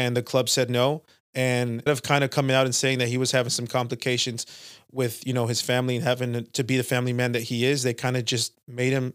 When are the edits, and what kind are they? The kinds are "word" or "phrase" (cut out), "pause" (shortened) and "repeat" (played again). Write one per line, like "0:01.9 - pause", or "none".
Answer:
0:01.9 - word

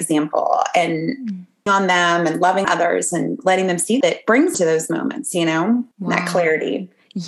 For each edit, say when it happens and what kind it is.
0:01.7 - word
0:02.6 - word
0:04.0 - word
0:04.5 - word
0:05.9 - pause

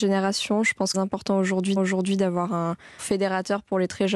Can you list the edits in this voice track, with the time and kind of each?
0:00.9 - phrase
0:01.8 - repeat
0:03.0 - phrase

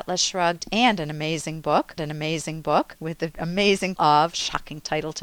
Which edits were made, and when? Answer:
0:02.0 - repeat
0:04.0 - word

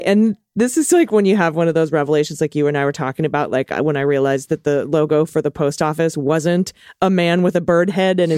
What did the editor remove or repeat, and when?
none

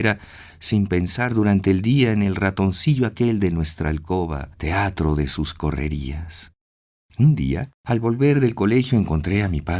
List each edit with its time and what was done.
0:04.5 - pause
0:07.8 - pause

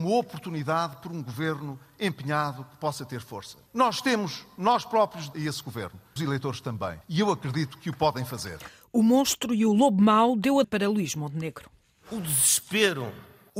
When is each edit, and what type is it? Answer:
0:05.3 - phrase
0:06.2 - phrase
0:07.0 - pause
0:10.6 - word

